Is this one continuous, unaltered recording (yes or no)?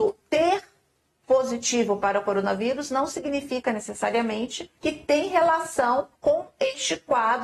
no